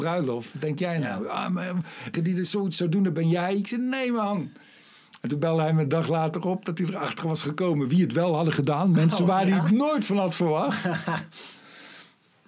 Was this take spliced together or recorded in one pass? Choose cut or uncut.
cut